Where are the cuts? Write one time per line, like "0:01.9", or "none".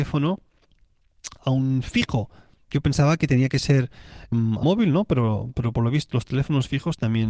0:01.4
0:04.3
0:04.6
0:06.1